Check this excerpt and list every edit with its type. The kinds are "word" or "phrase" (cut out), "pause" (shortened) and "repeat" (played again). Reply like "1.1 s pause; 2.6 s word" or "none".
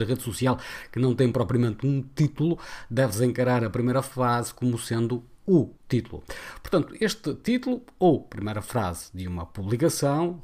5.8 s pause